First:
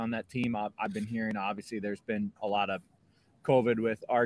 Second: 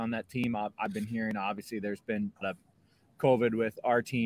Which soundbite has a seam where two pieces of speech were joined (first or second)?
second